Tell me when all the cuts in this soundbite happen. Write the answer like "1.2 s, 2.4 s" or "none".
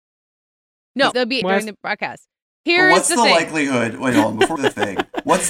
1.1 s, 1.4 s, 4.6 s